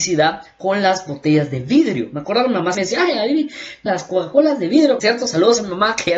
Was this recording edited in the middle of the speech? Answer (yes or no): yes